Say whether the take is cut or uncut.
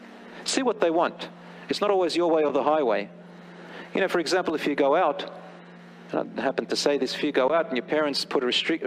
uncut